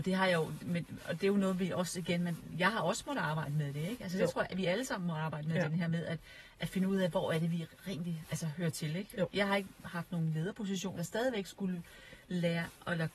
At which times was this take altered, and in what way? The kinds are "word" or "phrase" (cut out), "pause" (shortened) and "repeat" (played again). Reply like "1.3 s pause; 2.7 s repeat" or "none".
11.0 s phrase

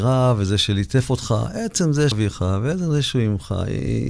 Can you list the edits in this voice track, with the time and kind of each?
2.1 s word

